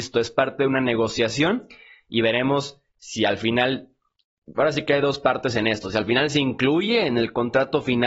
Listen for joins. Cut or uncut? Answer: uncut